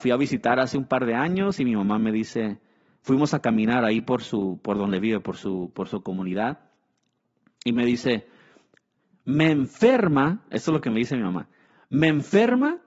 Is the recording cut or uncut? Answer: uncut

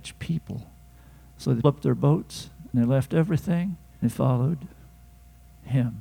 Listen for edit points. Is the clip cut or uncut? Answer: cut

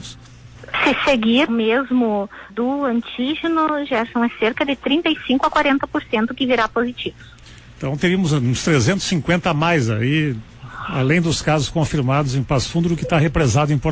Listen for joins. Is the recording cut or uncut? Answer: cut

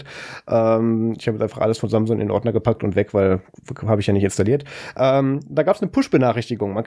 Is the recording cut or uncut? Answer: uncut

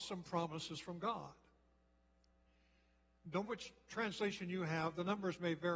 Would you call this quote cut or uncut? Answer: cut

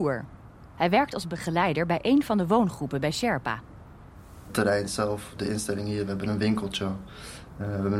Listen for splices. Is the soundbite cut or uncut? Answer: uncut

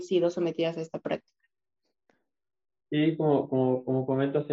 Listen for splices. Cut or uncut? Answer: uncut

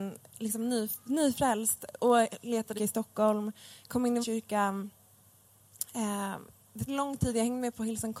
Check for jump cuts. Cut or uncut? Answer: cut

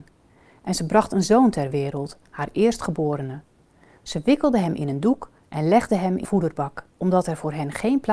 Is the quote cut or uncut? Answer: cut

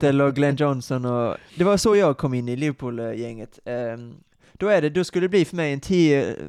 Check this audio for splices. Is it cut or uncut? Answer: uncut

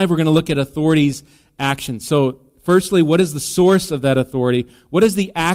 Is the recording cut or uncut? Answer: uncut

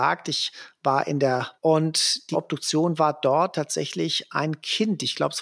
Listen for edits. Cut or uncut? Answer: cut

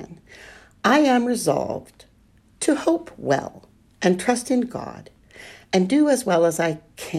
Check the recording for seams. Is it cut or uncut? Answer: uncut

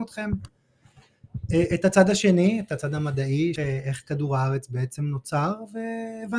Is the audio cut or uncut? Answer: cut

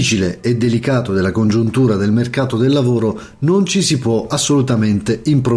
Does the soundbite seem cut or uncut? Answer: uncut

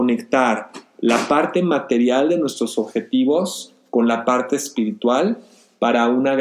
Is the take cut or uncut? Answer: uncut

